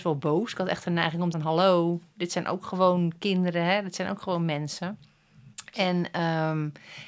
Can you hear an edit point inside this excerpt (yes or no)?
yes